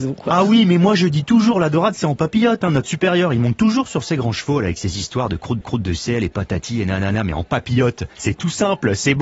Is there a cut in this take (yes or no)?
yes